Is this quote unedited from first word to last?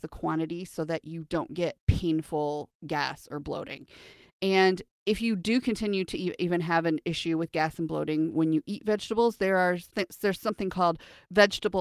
yes; 0 cuts

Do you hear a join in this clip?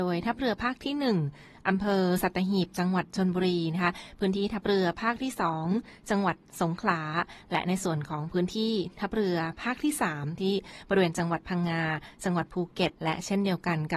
yes; 1 cut; at 13.0 s

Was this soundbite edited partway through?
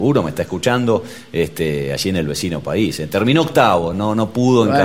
no; 0 cuts

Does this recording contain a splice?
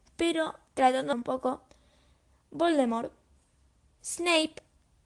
yes; 1 cut; at 1.1 s

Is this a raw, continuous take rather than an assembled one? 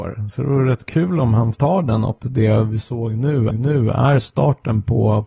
no; 3 cuts; at 1.5 s, 2.2 s, 3.5 s

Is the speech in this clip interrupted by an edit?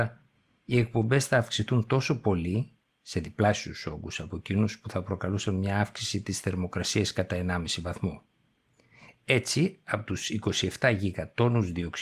no; 0 cuts

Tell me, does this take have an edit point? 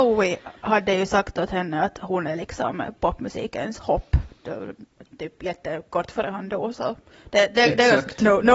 no; 0 cuts

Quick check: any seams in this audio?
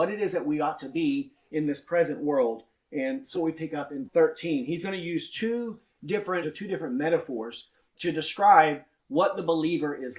yes; 3 cuts; at 3.3 s, 4.0 s, 6.4 s

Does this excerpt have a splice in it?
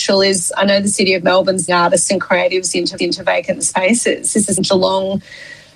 yes; 3 cuts; at 1.7 s, 3.0 s, 4.6 s

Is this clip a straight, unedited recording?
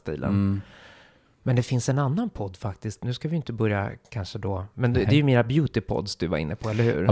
yes; 0 cuts

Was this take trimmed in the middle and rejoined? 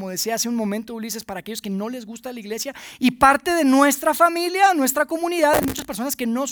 no; 0 cuts

